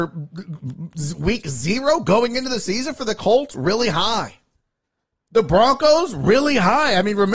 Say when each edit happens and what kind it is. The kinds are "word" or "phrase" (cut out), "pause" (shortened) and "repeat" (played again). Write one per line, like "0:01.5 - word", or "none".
none